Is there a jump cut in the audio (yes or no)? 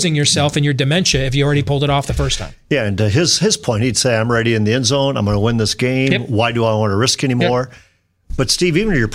no